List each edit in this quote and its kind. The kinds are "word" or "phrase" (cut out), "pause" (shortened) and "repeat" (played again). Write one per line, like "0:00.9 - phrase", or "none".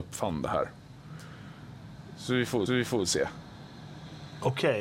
0:02.7 - repeat